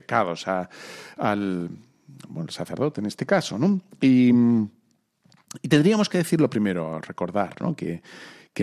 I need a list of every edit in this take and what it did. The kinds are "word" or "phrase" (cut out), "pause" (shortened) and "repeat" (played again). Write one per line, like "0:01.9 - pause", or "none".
none

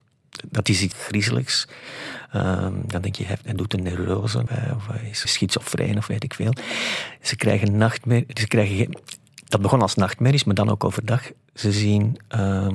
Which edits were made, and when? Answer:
0:00.9 - word
0:03.4 - word
0:04.5 - word
0:05.2 - word

